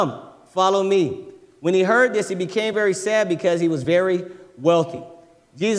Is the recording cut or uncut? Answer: uncut